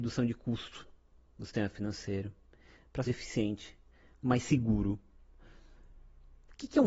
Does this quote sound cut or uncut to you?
cut